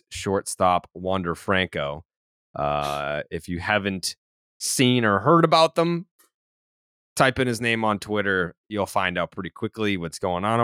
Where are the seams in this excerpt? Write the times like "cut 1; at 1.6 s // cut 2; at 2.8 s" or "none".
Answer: none